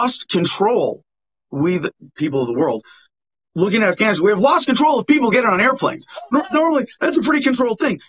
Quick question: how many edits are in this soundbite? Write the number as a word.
zero